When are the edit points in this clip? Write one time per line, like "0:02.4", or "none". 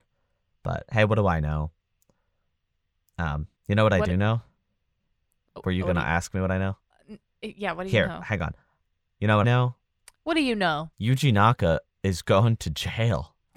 0:03.6
0:05.5
0:09.4
0:10.9